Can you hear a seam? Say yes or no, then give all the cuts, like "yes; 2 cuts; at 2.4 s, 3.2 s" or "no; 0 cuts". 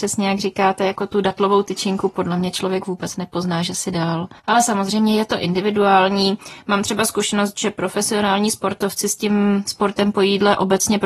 yes; 1 cut; at 4.4 s